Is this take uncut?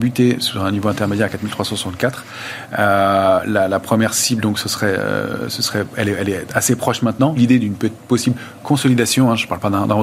no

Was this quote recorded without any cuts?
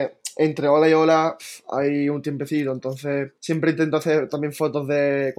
no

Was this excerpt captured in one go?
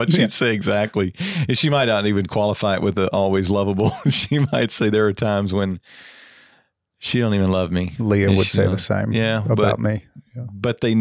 yes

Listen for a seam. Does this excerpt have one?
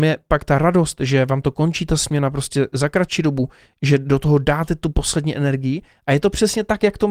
no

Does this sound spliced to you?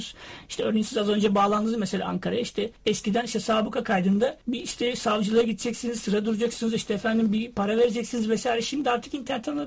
yes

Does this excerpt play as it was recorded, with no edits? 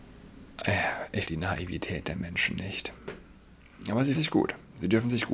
no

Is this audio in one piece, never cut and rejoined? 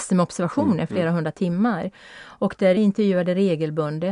no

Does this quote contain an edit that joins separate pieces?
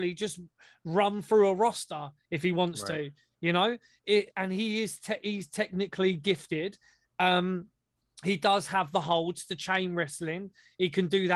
yes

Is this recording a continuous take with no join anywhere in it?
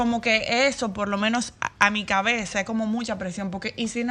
no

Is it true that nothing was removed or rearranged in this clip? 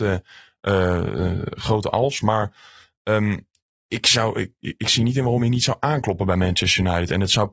yes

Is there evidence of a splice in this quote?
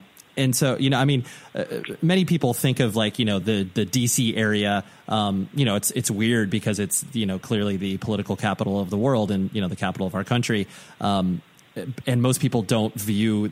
no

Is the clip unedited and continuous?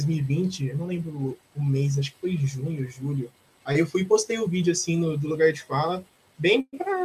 yes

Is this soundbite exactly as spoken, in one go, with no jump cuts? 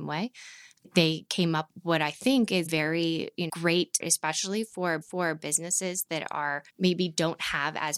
no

